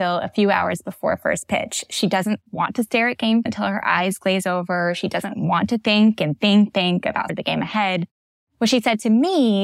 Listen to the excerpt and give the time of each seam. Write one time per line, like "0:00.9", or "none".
0:03.5
0:06.7
0:07.3